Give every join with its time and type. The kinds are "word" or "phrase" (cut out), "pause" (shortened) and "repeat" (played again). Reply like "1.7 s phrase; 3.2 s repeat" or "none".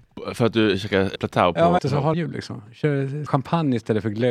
1.2 s phrase; 1.8 s word; 2.1 s phrase; 3.3 s word